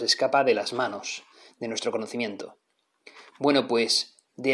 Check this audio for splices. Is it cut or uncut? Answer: uncut